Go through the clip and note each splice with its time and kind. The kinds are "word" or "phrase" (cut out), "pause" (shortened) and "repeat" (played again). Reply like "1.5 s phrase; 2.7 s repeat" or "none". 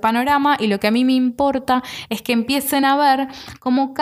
none